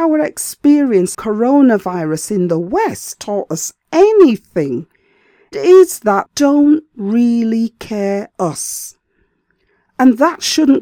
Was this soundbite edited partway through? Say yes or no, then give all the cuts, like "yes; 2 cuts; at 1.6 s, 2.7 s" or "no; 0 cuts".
yes; 5 cuts; at 1.1 s, 3.1 s, 5.5 s, 6.3 s, 8.3 s